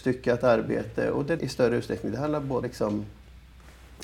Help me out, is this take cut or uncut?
cut